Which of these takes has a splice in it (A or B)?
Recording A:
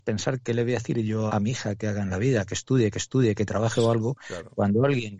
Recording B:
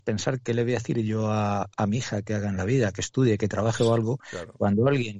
A